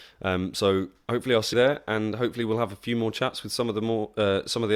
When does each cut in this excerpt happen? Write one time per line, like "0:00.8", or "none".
0:01.5